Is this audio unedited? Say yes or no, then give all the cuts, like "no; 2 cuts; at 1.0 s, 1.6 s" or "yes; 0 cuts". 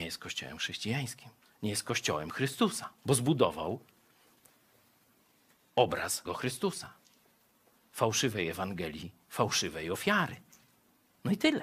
no; 3 cuts; at 1.4 s, 3.0 s, 6.2 s